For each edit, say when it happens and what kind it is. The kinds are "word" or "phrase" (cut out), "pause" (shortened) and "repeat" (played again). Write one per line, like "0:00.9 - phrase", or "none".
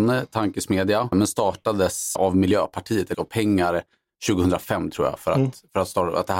0:01.1 - word
0:02.2 - word
0:03.1 - word